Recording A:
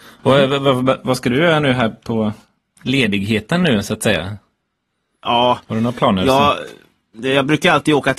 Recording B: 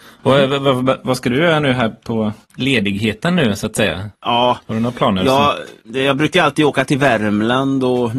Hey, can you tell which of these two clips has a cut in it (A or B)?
B